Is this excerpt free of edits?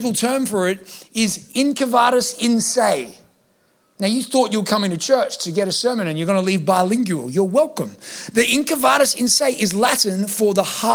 yes; 0 cuts

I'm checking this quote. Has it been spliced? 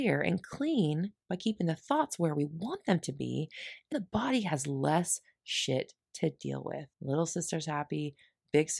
yes; 3 cuts; at 1.2 s, 3.9 s, 6.9 s

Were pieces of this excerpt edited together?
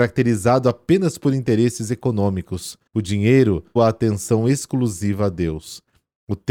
yes; 2 cuts; at 2.9 s, 3.8 s

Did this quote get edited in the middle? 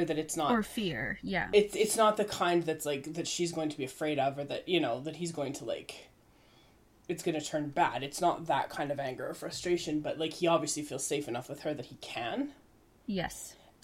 no; 0 cuts

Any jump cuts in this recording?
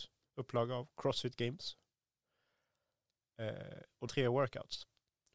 yes; 1 cut; at 4.1 s

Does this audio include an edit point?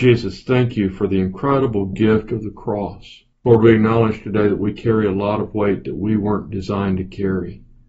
yes; 1 cut; at 3.3 s

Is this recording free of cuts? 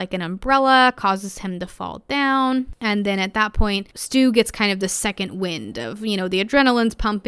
yes; 0 cuts

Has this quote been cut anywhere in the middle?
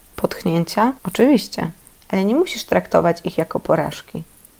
yes; 1 cut; at 1.0 s

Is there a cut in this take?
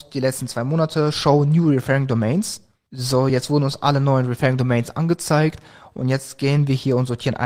no; 0 cuts

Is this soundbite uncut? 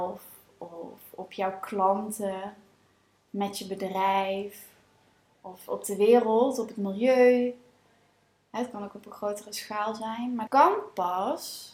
no; 1 cut; at 10.5 s

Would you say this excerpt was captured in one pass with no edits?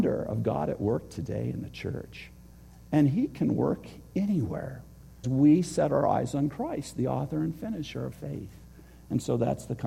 no; 2 cuts; at 5.2 s, 8.1 s

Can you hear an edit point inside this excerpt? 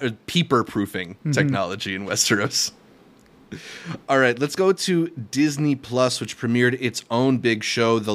no; 0 cuts

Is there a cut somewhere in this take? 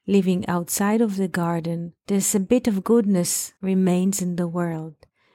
yes; 2 cuts; at 2.0 s, 3.6 s

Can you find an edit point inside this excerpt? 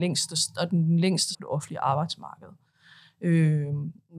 yes; 1 cut; at 1.3 s

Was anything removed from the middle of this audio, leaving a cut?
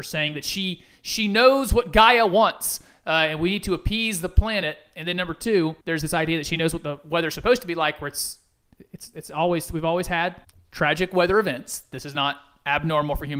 yes; 2 cuts; at 5.8 s, 10.4 s

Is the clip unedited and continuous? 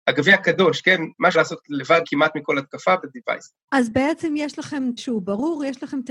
no; 4 cuts; at 1.3 s, 2.0 s, 3.0 s, 5.0 s

